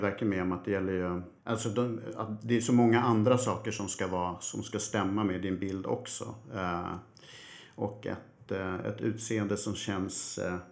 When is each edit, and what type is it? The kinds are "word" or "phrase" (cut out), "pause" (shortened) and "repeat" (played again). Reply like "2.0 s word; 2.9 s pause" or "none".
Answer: 1.4 s pause